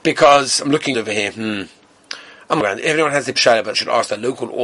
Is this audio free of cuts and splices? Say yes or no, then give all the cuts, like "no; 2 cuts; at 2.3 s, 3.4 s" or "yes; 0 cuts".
no; 4 cuts; at 0.9 s, 2.6 s, 3.4 s, 3.7 s